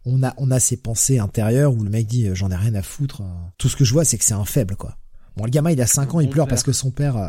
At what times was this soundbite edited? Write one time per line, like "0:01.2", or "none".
0:03.5

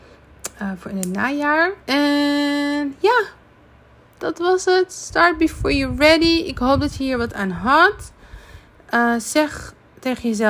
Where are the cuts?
0:01.8

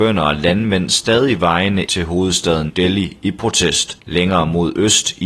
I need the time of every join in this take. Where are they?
0:01.8
0:02.7
0:04.0

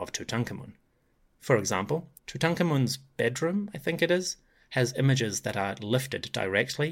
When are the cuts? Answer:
0:02.2

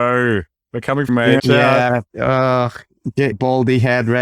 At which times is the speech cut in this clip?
0:01.1
0:01.4
0:02.1
0:03.3

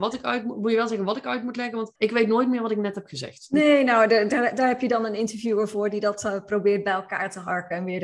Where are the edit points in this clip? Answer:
0:02.0

